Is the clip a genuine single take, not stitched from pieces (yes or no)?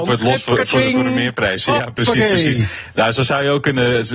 yes